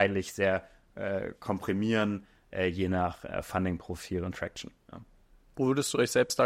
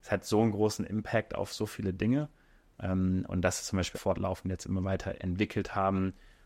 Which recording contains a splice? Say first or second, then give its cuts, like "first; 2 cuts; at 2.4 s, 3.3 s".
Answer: second; 2 cuts; at 3.9 s, 5.2 s